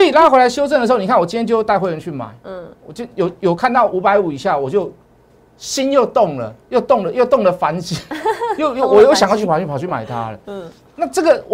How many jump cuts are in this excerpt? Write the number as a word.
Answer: one